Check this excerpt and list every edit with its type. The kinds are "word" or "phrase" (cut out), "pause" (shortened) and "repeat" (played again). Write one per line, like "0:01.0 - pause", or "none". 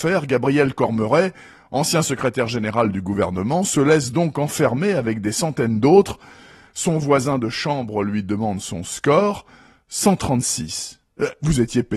none